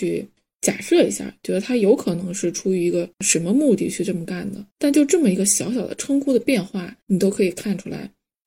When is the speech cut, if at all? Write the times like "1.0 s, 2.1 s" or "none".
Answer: 3.1 s, 4.7 s, 7.0 s

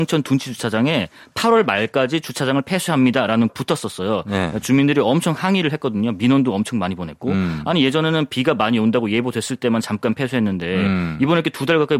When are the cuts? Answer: 3.5 s

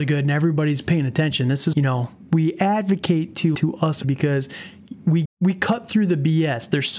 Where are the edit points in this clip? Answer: 1.7 s, 3.5 s, 4.0 s, 5.2 s

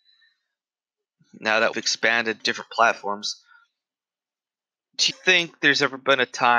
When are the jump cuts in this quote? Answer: 1.7 s, 2.4 s, 5.1 s

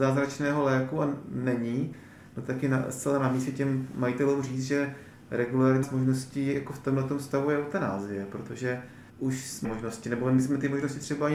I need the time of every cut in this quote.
5.8 s, 9.1 s, 9.6 s

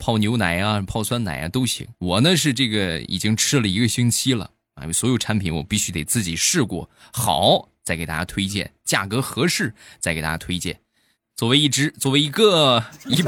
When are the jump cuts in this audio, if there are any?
2.0 s

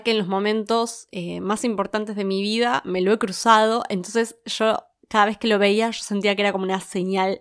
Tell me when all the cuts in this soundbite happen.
none

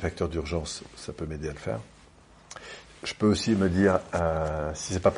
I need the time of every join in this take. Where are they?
none

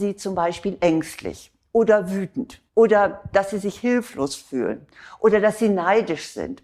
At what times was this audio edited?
2.7 s

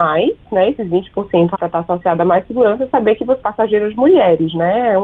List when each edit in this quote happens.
1.5 s, 3.4 s

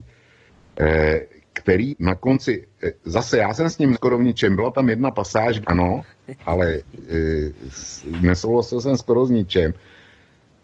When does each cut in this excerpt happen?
1.9 s, 3.9 s, 5.6 s

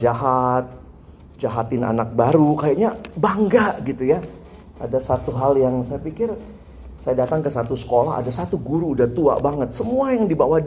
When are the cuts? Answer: none

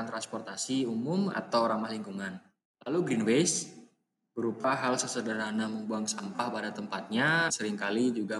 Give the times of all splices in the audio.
7.5 s

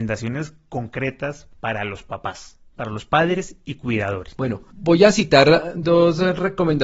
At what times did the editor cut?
5.7 s

